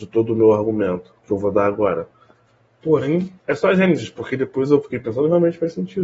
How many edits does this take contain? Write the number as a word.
two